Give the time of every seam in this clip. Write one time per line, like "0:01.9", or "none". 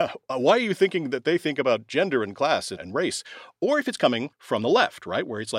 0:02.8
0:04.3